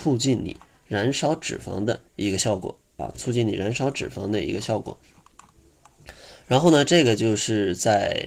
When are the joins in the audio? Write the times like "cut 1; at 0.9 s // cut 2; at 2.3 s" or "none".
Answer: cut 1; at 2.1 s